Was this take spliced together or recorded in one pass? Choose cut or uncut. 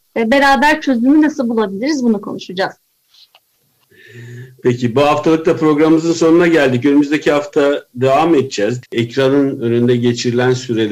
cut